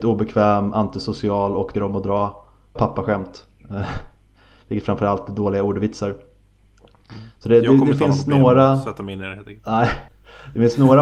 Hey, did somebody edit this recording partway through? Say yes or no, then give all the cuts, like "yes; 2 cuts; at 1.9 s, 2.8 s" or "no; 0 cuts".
yes; 3 cuts; at 1.7 s, 2.8 s, 10.1 s